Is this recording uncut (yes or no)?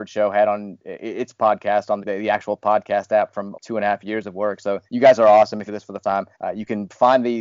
no